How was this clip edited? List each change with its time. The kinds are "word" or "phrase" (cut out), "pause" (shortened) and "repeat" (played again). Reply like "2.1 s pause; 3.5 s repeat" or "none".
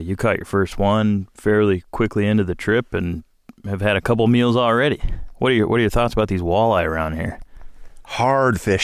none